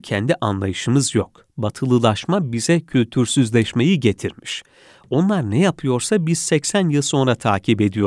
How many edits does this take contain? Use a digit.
0